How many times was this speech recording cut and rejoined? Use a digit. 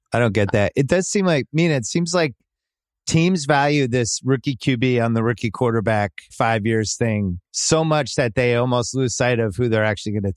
2